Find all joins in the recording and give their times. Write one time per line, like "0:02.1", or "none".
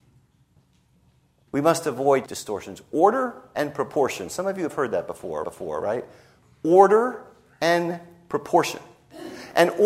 0:02.3
0:05.4